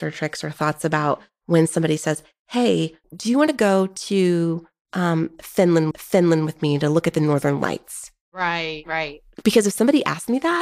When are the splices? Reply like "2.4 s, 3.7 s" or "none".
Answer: 3.0 s, 5.9 s